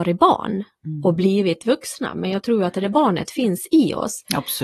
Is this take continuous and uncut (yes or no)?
yes